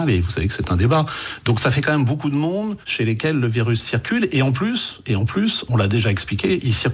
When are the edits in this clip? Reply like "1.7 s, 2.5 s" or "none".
2.8 s, 5.7 s